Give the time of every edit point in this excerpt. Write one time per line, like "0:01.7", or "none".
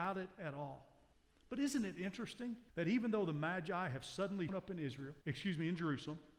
0:01.1
0:02.7
0:04.5
0:05.2